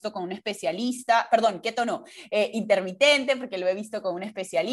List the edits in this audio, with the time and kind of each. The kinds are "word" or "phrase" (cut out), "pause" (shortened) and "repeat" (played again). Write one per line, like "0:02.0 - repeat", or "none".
none